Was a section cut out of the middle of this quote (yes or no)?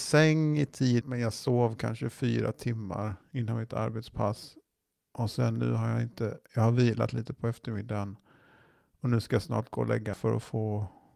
yes